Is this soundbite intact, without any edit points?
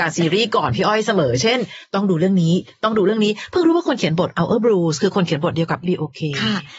no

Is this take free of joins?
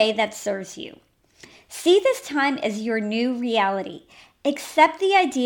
yes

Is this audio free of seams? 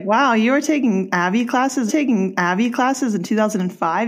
no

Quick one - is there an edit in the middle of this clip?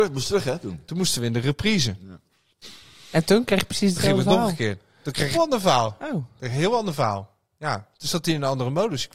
yes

